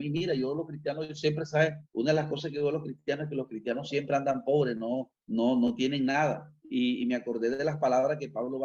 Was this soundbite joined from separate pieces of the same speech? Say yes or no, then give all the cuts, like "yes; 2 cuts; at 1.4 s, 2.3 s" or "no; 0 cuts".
yes; 3 cuts; at 1.8 s, 5.2 s, 6.6 s